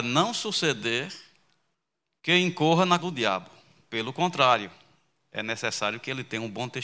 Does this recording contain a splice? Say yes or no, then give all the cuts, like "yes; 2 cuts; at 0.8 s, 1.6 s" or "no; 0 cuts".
yes; 1 cut; at 3.0 s